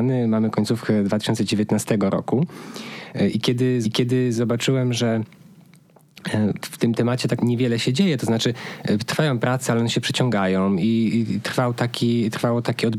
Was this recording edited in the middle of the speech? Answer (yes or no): yes